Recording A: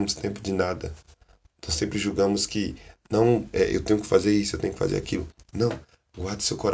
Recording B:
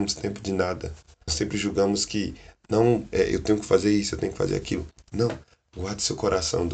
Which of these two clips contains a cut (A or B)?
B